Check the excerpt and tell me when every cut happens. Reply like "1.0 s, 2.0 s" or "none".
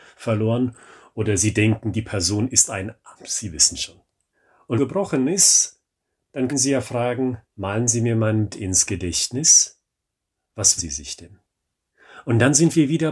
3.2 s, 4.8 s, 6.5 s, 7.4 s, 8.5 s, 10.8 s